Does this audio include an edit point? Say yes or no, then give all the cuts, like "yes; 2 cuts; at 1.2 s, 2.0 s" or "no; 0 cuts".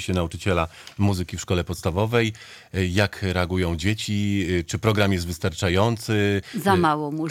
no; 0 cuts